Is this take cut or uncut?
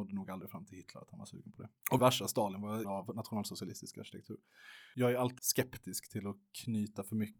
cut